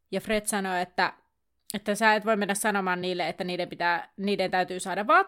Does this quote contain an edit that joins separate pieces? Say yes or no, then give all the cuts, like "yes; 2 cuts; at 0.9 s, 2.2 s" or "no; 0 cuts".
no; 0 cuts